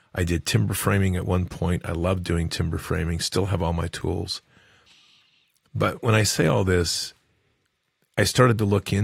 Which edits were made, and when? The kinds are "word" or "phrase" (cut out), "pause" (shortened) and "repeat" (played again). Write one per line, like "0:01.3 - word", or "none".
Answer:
none